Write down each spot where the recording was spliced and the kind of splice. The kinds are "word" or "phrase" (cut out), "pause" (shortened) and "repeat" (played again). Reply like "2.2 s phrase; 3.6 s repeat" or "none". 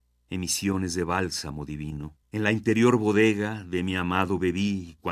2.2 s pause

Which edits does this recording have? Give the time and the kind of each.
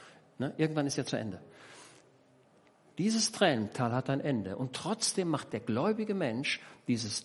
none

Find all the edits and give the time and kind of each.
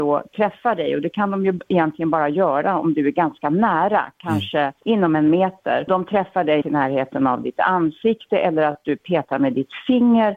4.8 s pause; 5.9 s word; 6.6 s word

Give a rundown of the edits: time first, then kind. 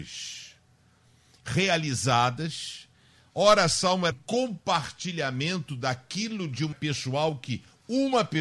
4.1 s word; 6.7 s word

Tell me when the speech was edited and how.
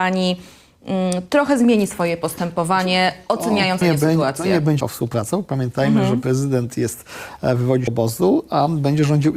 3.8 s phrase; 4.8 s word; 7.9 s phrase

